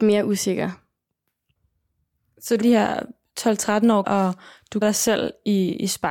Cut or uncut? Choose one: cut